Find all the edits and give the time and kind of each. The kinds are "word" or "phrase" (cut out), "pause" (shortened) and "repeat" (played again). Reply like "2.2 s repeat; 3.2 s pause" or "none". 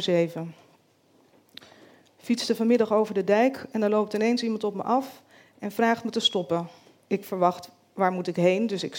none